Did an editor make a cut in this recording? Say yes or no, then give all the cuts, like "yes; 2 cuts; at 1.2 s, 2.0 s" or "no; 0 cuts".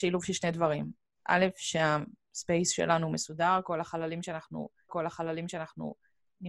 yes; 1 cut; at 4.9 s